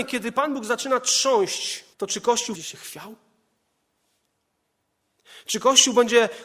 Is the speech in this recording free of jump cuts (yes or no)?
no